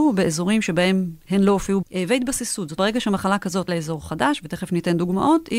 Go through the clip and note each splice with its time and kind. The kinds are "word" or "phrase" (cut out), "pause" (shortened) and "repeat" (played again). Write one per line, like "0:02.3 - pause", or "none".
0:01.8 - word
0:02.8 - word
0:03.7 - word